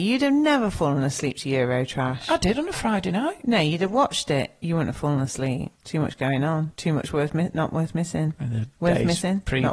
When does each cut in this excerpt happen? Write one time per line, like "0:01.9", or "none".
0:05.8